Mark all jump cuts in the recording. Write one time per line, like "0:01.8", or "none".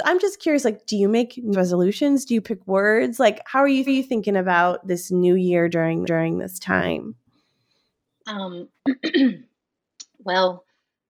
0:01.5
0:03.9
0:06.0